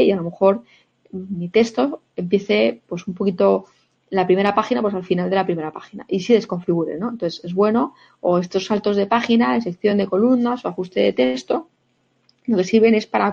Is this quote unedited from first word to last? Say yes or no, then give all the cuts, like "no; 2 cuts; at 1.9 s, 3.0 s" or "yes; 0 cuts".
yes; 0 cuts